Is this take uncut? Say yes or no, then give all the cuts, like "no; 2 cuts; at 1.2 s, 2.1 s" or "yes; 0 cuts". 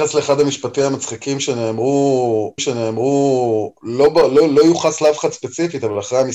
no; 1 cut; at 2.6 s